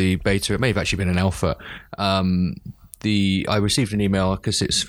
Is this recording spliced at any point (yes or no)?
no